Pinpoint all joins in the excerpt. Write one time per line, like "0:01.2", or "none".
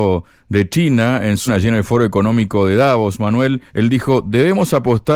0:01.5
0:03.7